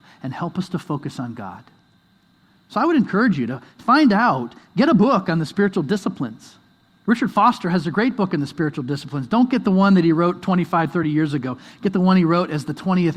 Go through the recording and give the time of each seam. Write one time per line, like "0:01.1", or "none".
none